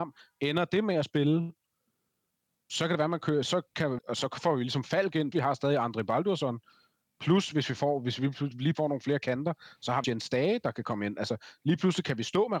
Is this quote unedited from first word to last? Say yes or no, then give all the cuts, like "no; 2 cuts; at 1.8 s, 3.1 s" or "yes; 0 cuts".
no; 4 cuts; at 4.0 s, 5.3 s, 8.7 s, 10.0 s